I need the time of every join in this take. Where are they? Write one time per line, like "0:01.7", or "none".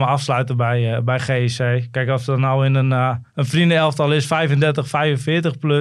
0:03.3